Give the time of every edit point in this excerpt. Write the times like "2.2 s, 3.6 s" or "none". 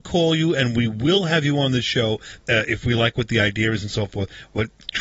2.4 s